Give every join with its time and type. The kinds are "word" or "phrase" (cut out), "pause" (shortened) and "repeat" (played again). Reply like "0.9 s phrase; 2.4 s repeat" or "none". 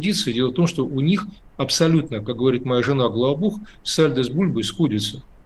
none

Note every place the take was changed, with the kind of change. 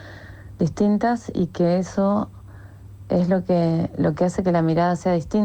none

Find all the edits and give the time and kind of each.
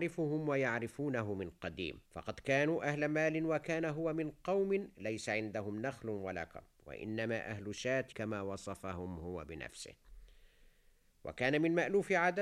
2.1 s pause; 8.1 s word

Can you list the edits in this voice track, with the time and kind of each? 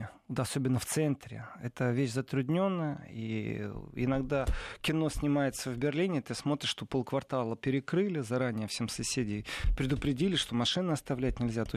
none

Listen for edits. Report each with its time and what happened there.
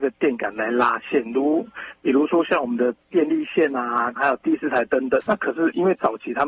4.2 s phrase; 5.3 s word

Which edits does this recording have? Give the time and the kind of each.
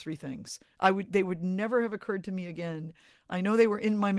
none

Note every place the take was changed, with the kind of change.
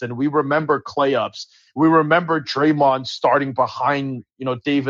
none

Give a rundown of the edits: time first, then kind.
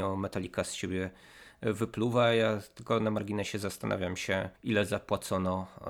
4.6 s pause

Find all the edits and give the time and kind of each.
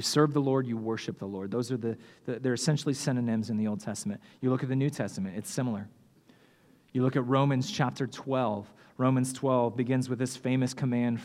none

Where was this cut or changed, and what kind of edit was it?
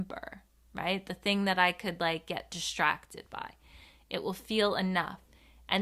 none

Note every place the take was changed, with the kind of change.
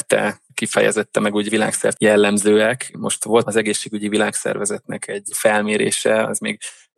2.0 s phrase; 3.4 s word

